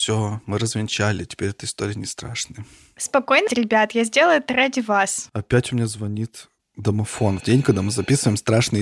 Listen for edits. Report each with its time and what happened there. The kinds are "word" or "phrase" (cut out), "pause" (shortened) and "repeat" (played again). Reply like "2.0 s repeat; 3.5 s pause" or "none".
3.5 s phrase; 7.4 s word